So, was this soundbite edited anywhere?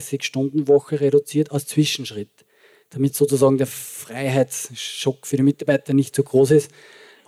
no; 0 cuts

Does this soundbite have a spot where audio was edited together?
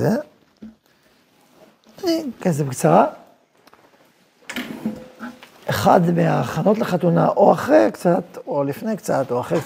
yes; 1 cut; at 5.5 s

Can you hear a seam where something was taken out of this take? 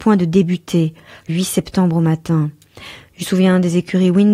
yes; 2 cuts; at 1.3 s, 3.2 s

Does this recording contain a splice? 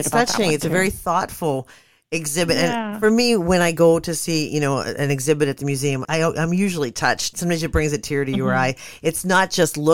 yes; 2 cuts; at 6.0 s, 7.3 s

